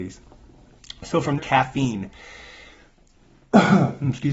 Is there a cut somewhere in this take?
yes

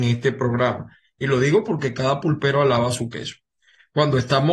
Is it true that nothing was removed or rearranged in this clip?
yes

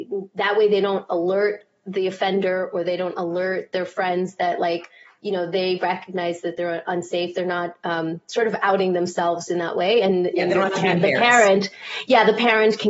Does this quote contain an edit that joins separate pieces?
no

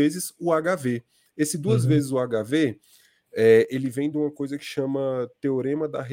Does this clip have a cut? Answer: no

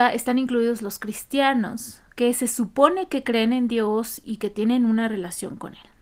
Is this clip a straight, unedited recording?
yes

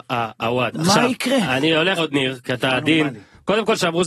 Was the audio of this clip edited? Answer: yes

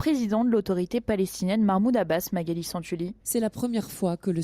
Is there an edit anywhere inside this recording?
yes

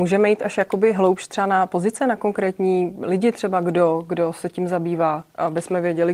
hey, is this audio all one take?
yes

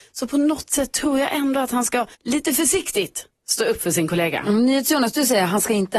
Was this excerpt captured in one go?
no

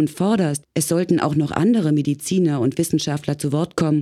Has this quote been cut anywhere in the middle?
no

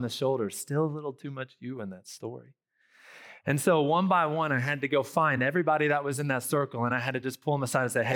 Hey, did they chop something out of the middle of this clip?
no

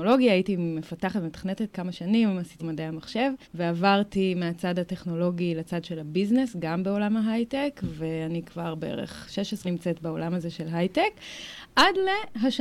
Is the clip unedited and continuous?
no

